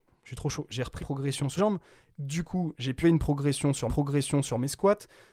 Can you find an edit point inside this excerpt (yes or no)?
yes